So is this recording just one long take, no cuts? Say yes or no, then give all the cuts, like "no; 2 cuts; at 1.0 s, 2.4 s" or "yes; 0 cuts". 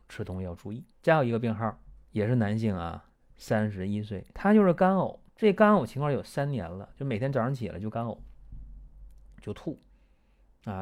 no; 4 cuts; at 0.9 s, 2.0 s, 4.3 s, 5.3 s